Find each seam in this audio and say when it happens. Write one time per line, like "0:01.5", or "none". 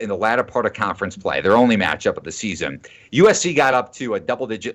none